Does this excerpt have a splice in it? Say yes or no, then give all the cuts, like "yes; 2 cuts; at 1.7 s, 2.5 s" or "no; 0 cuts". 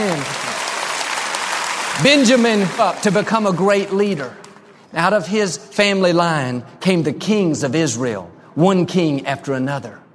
yes; 1 cut; at 2.8 s